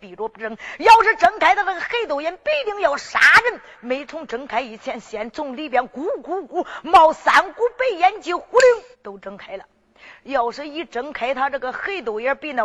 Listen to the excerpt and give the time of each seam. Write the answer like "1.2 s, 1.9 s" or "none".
8.9 s